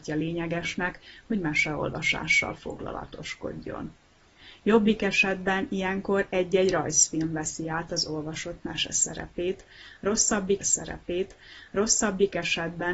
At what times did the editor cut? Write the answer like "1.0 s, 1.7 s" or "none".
10.6 s